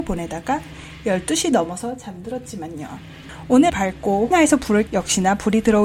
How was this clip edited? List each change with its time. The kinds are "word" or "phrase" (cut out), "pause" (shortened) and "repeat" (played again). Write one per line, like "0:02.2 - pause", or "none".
0:03.7 - word
0:04.3 - word
0:04.9 - word